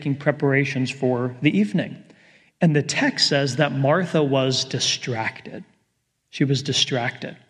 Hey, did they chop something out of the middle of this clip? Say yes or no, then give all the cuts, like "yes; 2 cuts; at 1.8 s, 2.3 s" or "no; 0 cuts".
no; 0 cuts